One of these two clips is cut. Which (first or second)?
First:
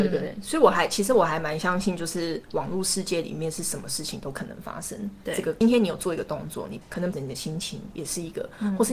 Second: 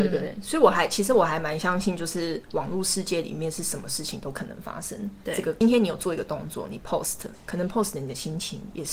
first